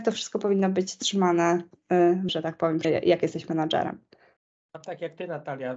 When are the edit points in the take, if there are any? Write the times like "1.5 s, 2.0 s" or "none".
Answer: 2.3 s, 2.8 s